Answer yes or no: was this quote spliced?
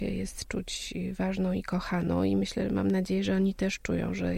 no